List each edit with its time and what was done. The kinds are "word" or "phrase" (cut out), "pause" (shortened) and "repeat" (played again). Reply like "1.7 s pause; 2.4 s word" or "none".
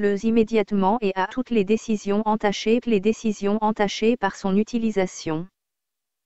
1.3 s word; 2.8 s repeat